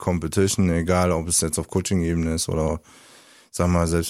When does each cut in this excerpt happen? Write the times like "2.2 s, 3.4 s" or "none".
none